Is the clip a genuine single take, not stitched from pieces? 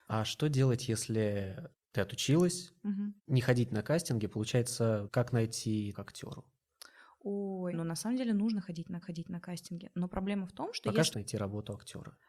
no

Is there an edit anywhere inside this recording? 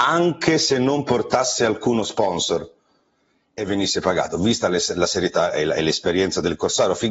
no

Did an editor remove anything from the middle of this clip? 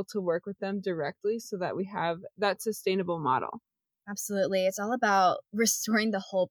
no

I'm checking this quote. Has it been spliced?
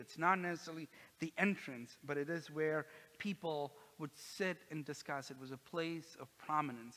no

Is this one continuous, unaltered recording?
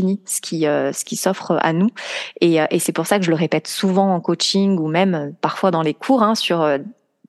yes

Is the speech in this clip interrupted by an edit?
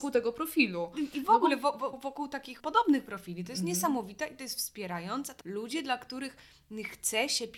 yes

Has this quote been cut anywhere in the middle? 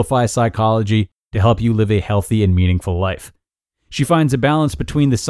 no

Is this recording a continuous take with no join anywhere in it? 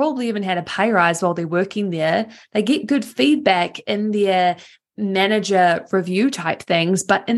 yes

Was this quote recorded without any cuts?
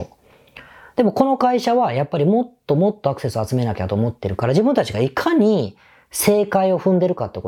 yes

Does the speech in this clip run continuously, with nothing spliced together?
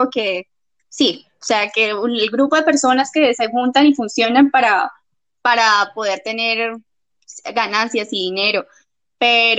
yes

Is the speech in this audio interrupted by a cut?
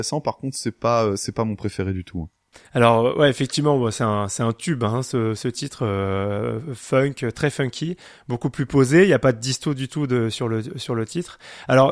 no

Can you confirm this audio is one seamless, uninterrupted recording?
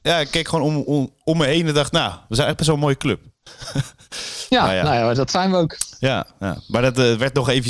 yes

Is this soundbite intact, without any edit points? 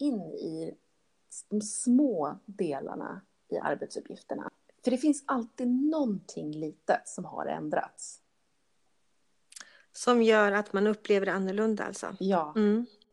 yes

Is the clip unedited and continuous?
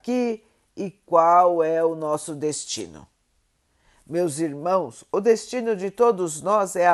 yes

